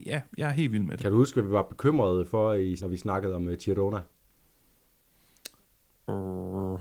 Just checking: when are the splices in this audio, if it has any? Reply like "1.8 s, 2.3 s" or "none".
2.8 s